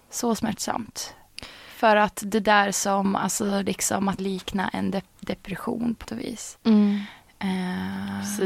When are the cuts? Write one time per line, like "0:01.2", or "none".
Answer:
0:04.2
0:06.0